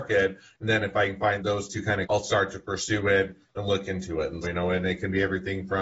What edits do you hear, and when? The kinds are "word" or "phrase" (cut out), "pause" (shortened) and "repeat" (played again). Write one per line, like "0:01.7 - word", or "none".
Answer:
0:01.4 - word
0:02.0 - phrase
0:04.4 - word